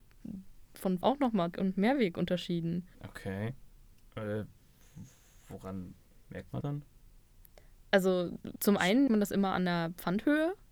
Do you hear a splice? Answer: yes; 7 cuts; at 1.0 s, 1.5 s, 2.9 s, 6.1 s, 6.6 s, 8.6 s, 9.1 s

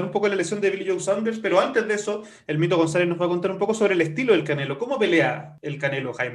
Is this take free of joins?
yes; 0 cuts

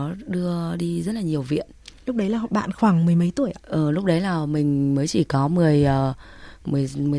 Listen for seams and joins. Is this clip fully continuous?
yes; 0 cuts

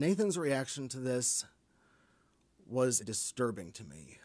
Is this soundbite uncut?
no; 1 cut; at 3.0 s

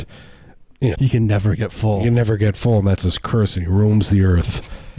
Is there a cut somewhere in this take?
yes; 1 cut; at 1.0 s

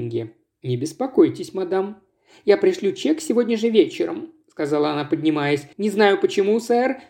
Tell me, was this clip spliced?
yes; 1 cut; at 5.7 s

